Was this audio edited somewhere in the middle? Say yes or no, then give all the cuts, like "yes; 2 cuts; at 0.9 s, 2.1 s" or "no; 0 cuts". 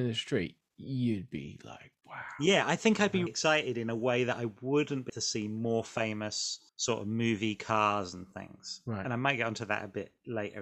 yes; 4 cuts; at 2.0 s, 3.3 s, 5.1 s, 6.7 s